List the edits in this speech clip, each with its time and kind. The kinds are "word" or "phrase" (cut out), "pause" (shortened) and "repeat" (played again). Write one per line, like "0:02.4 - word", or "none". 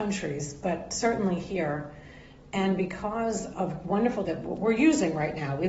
0:03.5 - word
0:04.2 - word